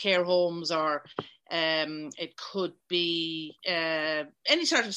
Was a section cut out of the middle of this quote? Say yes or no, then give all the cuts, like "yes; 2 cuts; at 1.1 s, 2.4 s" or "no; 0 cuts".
yes; 1 cut; at 3.6 s